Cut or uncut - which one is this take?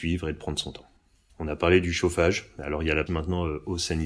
cut